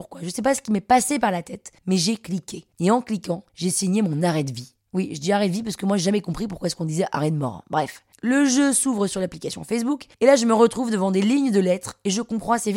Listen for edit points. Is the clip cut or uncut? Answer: cut